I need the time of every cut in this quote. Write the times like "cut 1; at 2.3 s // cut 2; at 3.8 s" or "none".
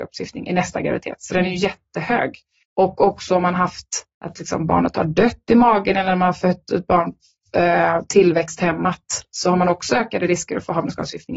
cut 1; at 2.6 s // cut 2; at 4.1 s